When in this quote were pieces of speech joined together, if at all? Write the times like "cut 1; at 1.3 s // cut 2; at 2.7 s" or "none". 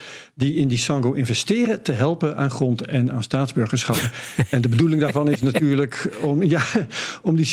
none